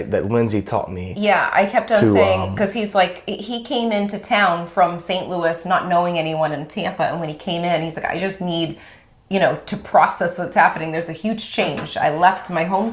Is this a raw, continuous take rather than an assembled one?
yes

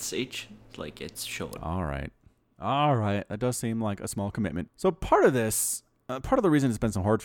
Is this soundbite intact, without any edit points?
yes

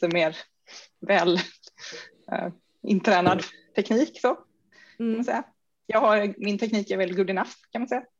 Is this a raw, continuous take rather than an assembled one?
yes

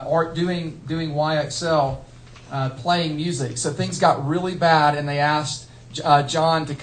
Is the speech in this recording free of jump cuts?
yes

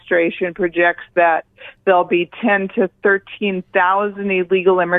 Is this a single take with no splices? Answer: yes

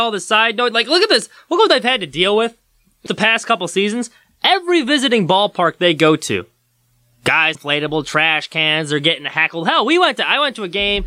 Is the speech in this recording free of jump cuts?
no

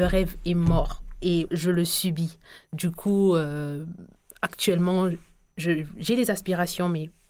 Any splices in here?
yes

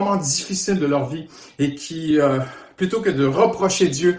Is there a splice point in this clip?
no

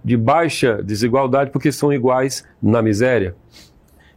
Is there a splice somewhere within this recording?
no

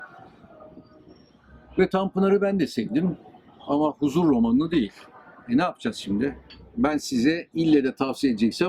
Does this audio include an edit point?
no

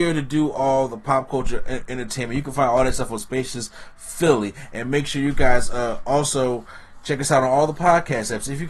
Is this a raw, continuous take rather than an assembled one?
yes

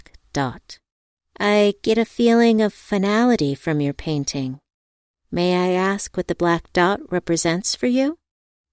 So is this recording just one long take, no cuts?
no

